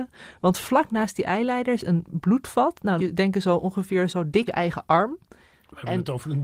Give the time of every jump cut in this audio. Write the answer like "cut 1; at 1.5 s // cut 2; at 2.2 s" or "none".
cut 1; at 1.8 s // cut 2; at 3.0 s // cut 3; at 4.1 s // cut 4; at 4.5 s